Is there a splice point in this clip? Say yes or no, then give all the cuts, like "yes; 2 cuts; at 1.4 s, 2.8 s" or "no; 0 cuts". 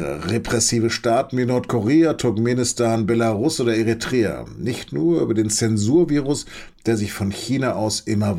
no; 0 cuts